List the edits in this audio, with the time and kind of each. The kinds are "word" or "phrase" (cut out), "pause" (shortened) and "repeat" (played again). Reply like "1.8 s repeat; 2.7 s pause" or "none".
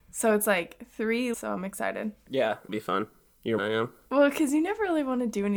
1.3 s phrase; 2.7 s word; 3.6 s phrase

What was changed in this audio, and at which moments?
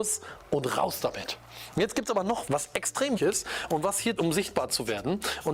2.5 s word; 3.2 s word; 4.2 s word

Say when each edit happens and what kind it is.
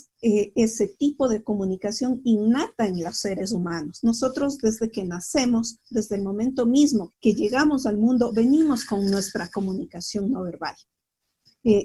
7.1 s word

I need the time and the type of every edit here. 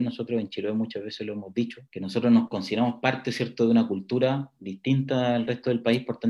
1.9 s pause

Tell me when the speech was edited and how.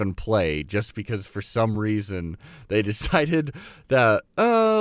none

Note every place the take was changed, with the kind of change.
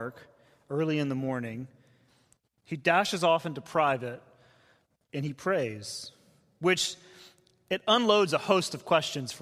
none

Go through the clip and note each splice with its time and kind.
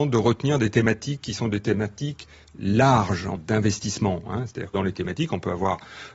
3.4 s word; 4.7 s word

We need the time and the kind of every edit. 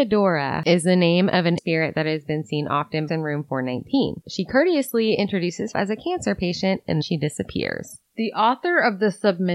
1.6 s word; 3.1 s phrase; 5.7 s word; 7.0 s word

